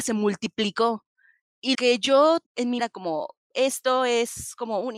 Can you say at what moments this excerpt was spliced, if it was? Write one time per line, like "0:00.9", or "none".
0:01.7
0:02.5
0:02.8